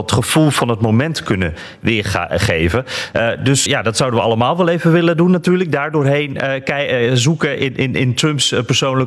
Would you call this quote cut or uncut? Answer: cut